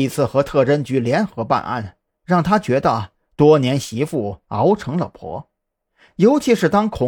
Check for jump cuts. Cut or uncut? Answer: uncut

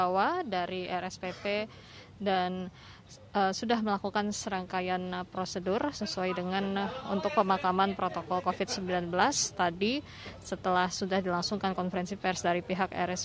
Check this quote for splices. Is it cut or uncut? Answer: uncut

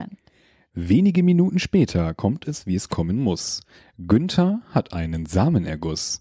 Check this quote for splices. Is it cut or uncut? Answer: uncut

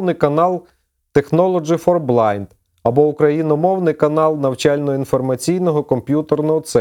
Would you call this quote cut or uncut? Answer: uncut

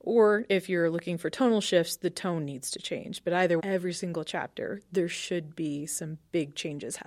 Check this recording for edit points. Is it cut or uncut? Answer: cut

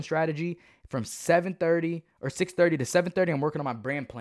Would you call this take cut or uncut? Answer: uncut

